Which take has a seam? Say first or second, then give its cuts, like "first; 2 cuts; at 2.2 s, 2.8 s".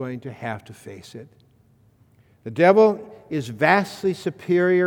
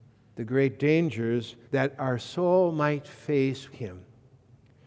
second; 2 cuts; at 1.6 s, 3.7 s